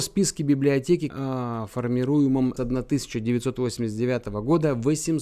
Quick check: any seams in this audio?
yes; 2 cuts; at 1.1 s, 2.6 s

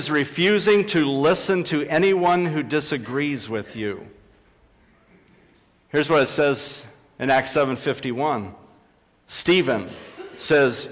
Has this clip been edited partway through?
no; 0 cuts

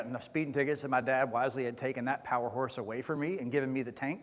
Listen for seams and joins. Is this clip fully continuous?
yes; 0 cuts

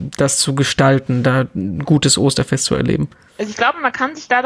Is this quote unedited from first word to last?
yes; 0 cuts

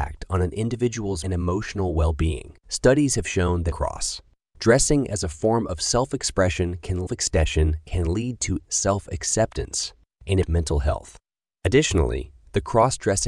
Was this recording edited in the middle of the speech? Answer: yes; 6 cuts; at 1.2 s, 2.6 s, 3.7 s, 7.1 s, 8.6 s, 10.4 s

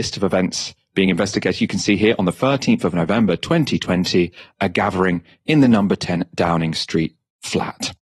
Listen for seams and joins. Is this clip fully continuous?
yes; 0 cuts

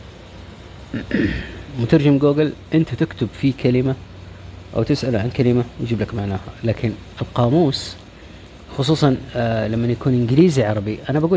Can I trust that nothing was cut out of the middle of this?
yes; 0 cuts

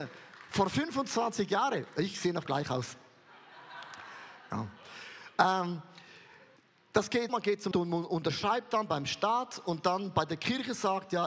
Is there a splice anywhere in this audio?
yes; 4 cuts; at 2.5 s, 6.6 s, 7.3 s, 7.7 s

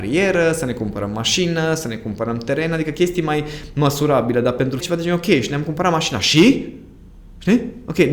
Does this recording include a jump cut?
yes; 1 cut; at 4.8 s

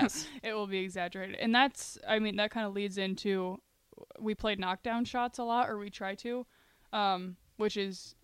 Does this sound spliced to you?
no; 0 cuts

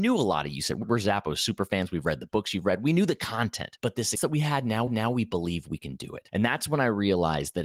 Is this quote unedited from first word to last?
no; 2 cuts; at 4.1 s, 4.9 s

